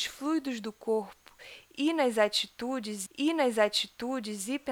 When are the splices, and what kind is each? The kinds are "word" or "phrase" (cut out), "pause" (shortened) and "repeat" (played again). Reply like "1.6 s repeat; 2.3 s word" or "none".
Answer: 3.1 s repeat